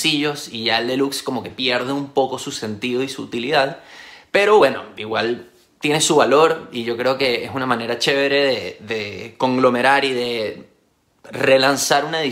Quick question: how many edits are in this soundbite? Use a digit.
0